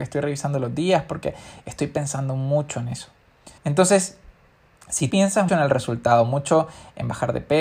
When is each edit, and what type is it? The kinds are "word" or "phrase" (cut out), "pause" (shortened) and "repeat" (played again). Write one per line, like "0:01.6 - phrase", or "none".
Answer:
0:03.6 - pause
0:05.1 - word
0:05.5 - word

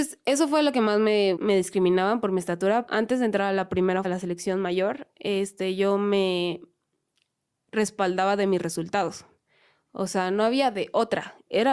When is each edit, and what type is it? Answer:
0:01.4 - word
0:02.9 - word
0:04.0 - word

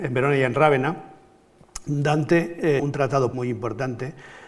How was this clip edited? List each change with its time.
0:02.8 - word
0:03.3 - word

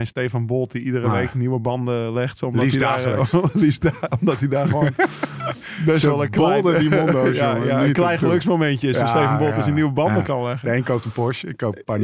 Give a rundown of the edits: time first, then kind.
none

